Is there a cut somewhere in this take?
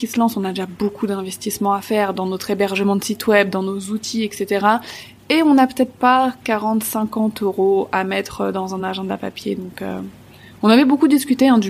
no; 0 cuts

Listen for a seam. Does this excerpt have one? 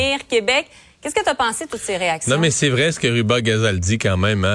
no; 0 cuts

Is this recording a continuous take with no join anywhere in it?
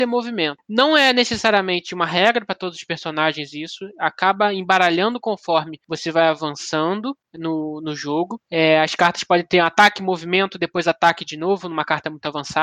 yes; 0 cuts

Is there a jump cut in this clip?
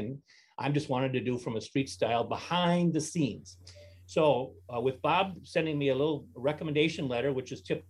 no; 0 cuts

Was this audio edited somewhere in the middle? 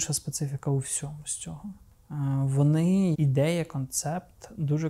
yes; 1 cut; at 3.1 s

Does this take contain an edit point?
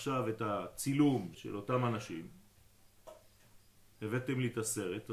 yes; 1 cut; at 1.3 s

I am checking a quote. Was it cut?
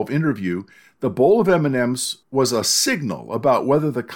yes; 1 cut; at 2.2 s

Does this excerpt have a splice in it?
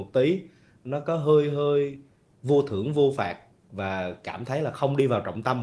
no; 0 cuts

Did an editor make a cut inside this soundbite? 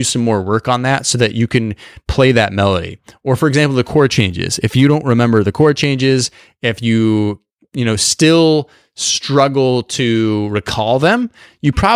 no; 0 cuts

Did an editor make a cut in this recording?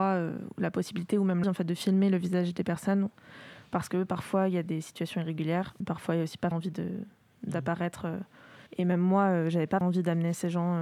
yes; 5 cuts; at 1.4 s, 5.8 s, 6.5 s, 8.7 s, 9.8 s

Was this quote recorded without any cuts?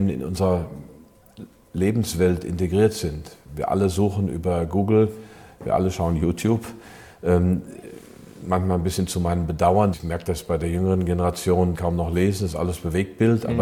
no; 2 cuts; at 9.9 s, 11.7 s

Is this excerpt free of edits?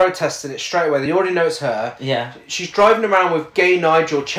yes; 0 cuts

